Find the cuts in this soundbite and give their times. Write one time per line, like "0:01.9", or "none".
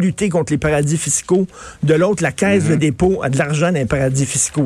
none